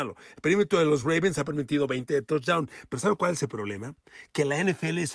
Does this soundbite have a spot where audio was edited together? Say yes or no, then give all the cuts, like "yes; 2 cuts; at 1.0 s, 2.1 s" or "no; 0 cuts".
no; 0 cuts